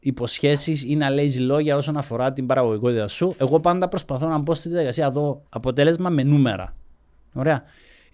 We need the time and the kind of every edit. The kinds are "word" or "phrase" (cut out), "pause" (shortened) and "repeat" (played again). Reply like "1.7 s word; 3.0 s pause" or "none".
5.5 s pause